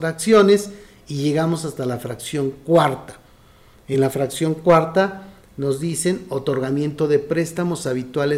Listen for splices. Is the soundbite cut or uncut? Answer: uncut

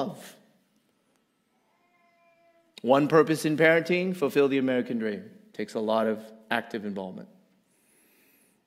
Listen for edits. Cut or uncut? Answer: uncut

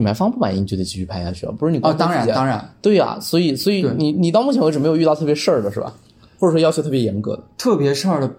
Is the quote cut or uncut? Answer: uncut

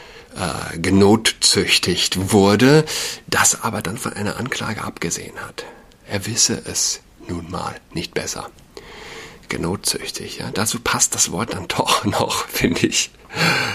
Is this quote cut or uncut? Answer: uncut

